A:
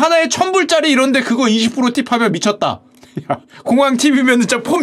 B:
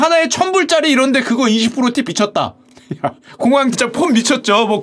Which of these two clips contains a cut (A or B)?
B